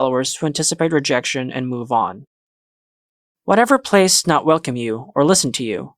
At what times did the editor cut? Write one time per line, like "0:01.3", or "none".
0:04.2